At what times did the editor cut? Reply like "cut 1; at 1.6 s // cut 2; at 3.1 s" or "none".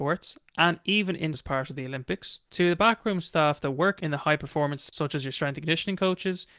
cut 1; at 1.3 s // cut 2; at 4.9 s